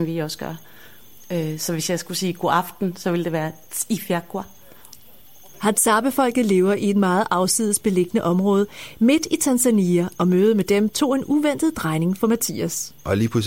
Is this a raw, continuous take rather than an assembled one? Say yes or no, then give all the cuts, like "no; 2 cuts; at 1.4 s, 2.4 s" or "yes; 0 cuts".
yes; 0 cuts